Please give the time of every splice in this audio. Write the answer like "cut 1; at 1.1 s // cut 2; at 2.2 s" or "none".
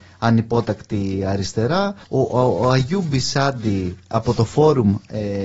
cut 1; at 2.0 s